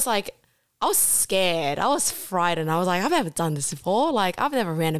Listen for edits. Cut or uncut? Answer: uncut